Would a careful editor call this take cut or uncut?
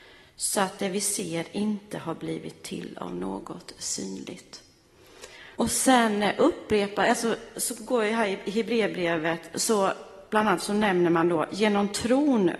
cut